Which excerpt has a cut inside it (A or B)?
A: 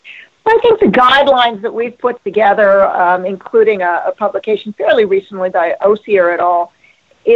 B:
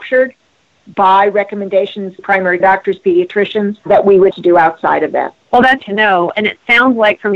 B